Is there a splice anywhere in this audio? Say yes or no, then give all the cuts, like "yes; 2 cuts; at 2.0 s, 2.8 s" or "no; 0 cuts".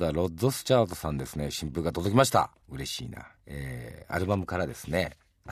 yes; 2 cuts; at 2.6 s, 3.4 s